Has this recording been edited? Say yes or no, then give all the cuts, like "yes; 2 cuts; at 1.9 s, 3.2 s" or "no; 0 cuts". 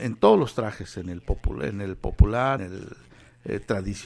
yes; 1 cut; at 2.6 s